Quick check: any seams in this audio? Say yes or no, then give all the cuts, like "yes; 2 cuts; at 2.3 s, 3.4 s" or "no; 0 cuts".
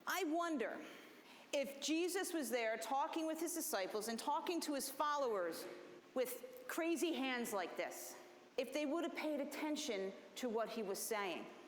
no; 0 cuts